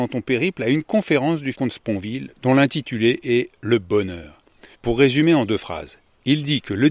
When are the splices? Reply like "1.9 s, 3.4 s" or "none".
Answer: 1.5 s, 4.7 s